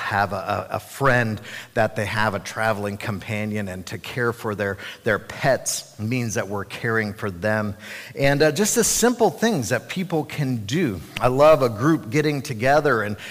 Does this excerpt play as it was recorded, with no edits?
yes; 0 cuts

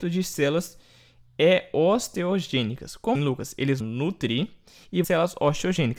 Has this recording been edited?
yes; 3 cuts; at 3.1 s, 3.8 s, 5.0 s

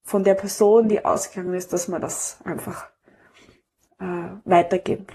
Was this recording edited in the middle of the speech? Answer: no; 0 cuts

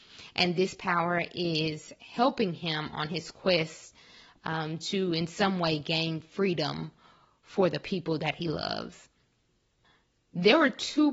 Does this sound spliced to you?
no; 0 cuts

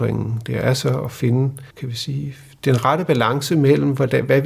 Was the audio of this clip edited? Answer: yes; 1 cut; at 1.7 s

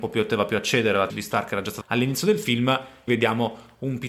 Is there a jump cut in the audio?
yes; 3 cuts; at 1.1 s, 1.8 s, 3.1 s

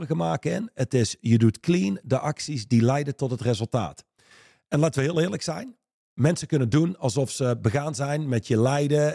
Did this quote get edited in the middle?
no; 0 cuts

